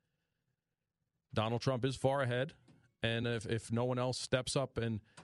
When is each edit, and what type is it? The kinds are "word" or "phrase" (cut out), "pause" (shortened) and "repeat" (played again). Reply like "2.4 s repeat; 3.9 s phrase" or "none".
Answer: none